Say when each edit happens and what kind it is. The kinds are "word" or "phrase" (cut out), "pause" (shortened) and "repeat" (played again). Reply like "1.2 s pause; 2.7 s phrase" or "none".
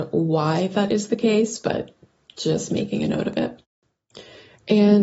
none